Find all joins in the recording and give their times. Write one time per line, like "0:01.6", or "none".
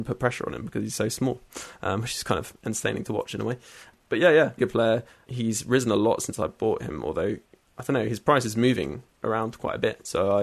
0:04.6
0:09.1